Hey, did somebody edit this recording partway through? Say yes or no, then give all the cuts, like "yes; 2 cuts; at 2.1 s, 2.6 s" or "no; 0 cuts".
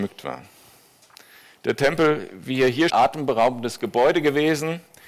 yes; 1 cut; at 2.9 s